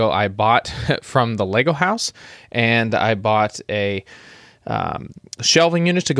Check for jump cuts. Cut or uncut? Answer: uncut